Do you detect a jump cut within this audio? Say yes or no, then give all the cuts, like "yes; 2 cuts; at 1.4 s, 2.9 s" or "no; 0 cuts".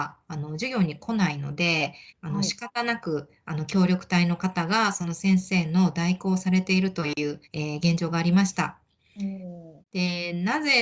yes; 3 cuts; at 2.1 s, 7.4 s, 9.8 s